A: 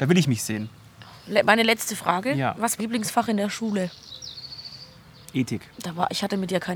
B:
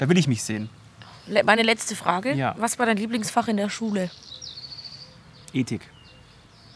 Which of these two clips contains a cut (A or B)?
A